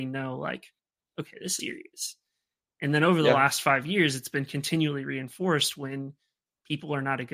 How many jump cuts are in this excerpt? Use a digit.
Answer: 1